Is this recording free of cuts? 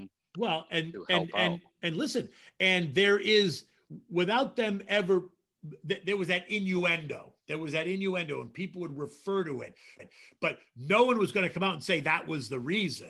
no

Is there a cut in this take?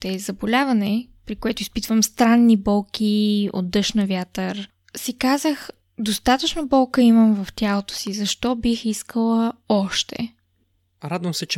no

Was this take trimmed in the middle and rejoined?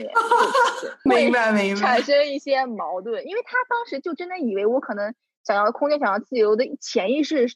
no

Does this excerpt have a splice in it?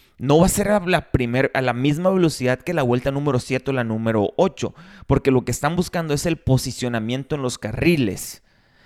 no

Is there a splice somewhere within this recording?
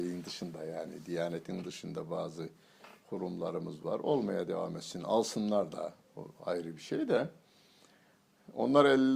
no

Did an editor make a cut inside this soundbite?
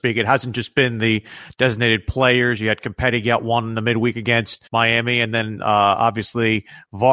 yes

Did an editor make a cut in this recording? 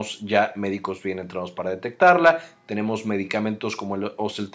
no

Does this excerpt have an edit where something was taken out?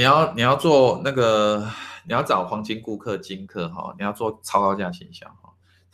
no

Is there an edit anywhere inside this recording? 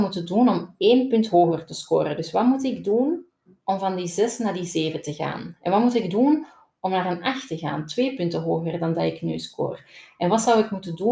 no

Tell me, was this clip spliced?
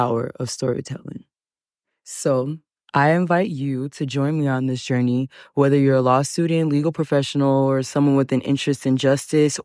no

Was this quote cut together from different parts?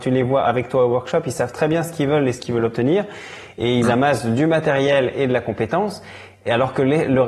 no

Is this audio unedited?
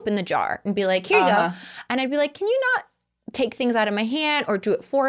yes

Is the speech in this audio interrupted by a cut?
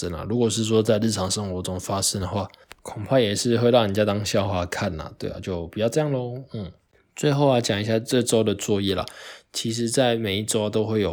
no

